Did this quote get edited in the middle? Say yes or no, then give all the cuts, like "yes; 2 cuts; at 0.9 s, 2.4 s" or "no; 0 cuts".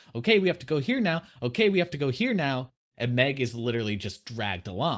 no; 0 cuts